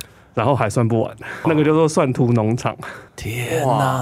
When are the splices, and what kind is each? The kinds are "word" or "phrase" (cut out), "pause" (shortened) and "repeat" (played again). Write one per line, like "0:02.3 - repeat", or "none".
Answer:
0:01.4 - phrase
0:03.1 - pause